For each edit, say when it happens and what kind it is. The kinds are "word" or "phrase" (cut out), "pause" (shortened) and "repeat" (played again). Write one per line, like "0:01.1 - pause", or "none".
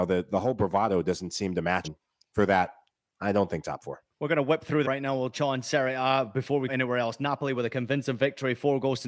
0:01.8 - word
0:04.1 - pause
0:04.8 - phrase
0:05.3 - word
0:06.7 - word